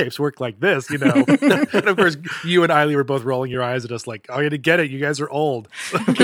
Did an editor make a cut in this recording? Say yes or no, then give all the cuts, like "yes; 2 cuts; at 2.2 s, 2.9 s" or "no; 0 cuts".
no; 0 cuts